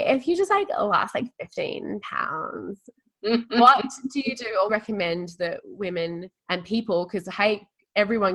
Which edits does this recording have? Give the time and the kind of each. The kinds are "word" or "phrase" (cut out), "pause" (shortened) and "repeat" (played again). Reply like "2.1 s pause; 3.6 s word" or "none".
4.7 s phrase; 6.4 s pause